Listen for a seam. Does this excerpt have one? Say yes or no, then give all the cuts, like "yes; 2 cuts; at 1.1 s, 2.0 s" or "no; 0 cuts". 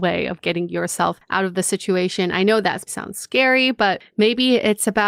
yes; 1 cut; at 2.9 s